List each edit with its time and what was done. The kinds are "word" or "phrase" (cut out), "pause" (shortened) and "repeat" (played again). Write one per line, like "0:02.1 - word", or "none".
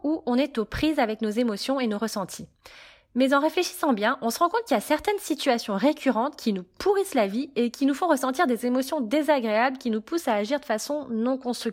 none